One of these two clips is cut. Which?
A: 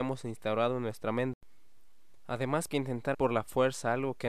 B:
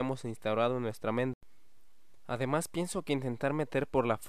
A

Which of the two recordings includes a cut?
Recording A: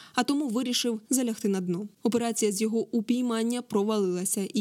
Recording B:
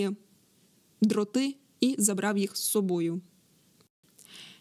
A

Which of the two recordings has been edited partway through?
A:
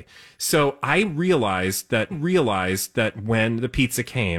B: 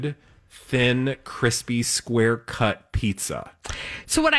A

